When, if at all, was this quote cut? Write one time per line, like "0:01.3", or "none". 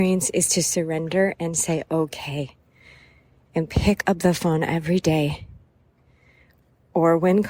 none